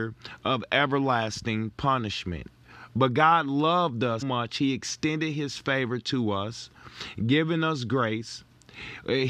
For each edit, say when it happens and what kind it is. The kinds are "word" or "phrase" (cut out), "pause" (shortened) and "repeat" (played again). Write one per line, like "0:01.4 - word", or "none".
0:04.2 - word